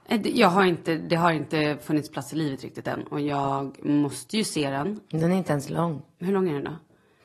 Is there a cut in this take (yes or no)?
no